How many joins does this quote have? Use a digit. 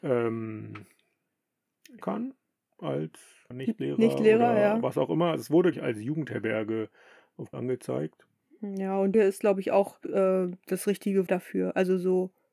7